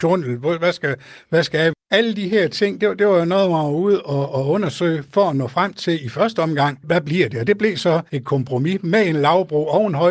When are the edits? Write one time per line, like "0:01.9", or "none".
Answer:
0:01.8
0:08.1